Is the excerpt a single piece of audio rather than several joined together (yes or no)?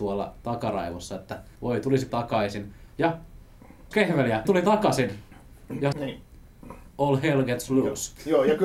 no